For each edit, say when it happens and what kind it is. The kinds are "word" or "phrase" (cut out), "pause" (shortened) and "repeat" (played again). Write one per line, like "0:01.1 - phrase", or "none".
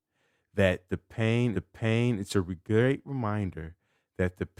0:01.5 - repeat